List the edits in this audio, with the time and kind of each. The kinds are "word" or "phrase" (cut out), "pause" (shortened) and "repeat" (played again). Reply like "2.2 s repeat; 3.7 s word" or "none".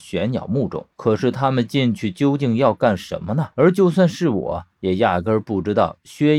0.9 s pause; 3.5 s pause